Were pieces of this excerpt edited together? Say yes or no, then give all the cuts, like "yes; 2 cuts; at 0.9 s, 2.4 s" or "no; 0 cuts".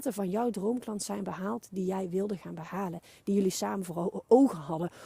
no; 0 cuts